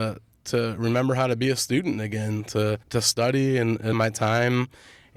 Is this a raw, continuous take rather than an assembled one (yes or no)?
no